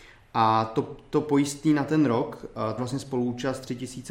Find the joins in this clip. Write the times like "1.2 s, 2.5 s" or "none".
2.8 s

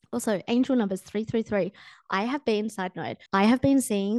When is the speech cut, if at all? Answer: 3.3 s

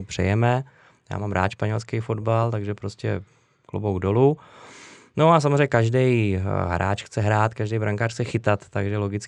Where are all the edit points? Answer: none

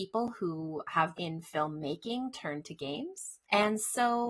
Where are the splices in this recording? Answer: 1.1 s

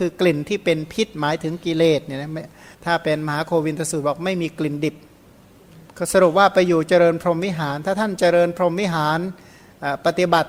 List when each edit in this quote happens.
2.7 s, 5.9 s

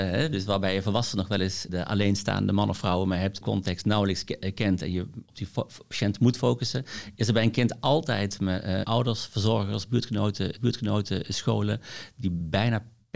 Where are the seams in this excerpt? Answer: 1.7 s, 3.4 s, 8.8 s, 10.6 s

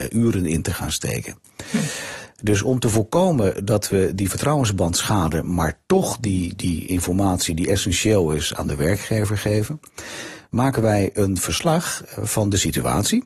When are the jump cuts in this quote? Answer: 12.2 s

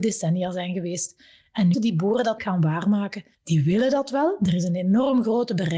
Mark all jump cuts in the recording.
1.7 s, 2.4 s, 3.3 s

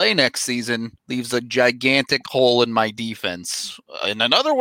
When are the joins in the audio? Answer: 1.0 s

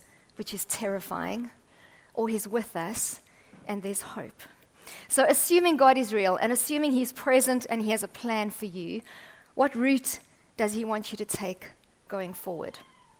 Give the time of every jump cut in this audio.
none

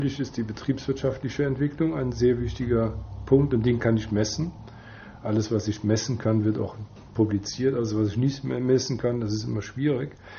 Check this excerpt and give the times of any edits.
none

